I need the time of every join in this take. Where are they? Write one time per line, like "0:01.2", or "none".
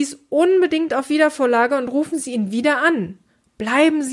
none